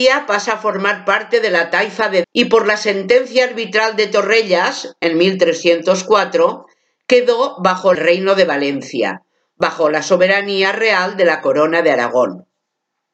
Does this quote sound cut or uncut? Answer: cut